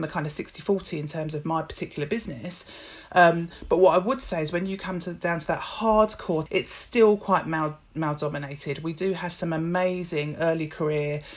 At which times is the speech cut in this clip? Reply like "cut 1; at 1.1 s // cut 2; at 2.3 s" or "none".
cut 1; at 6.5 s